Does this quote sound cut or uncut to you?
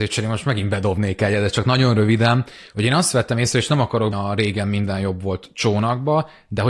cut